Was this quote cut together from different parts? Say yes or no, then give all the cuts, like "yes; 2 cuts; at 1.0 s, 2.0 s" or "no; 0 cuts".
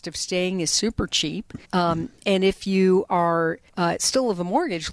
yes; 2 cuts; at 1.6 s, 3.7 s